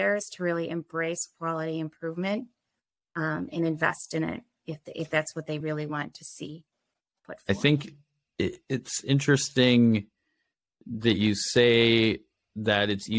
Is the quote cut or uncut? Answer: uncut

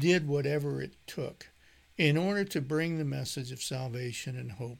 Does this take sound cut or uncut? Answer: uncut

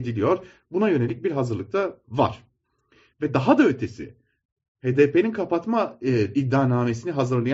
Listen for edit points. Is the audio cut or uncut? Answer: uncut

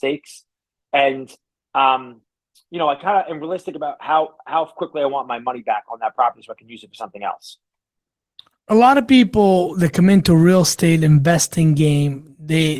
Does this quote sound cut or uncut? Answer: uncut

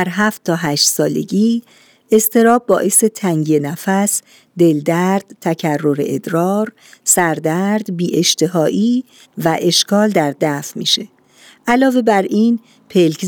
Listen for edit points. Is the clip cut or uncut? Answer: uncut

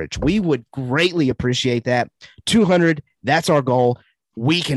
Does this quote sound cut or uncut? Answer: uncut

